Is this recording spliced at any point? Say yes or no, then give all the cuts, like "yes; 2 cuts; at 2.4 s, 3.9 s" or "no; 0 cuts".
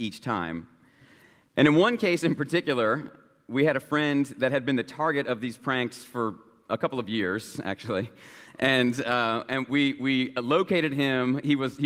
no; 0 cuts